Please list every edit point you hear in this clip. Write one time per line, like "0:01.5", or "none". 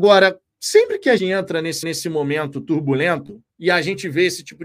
0:01.2
0:01.8
0:03.5